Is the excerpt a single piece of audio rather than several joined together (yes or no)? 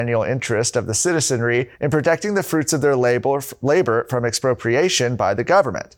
no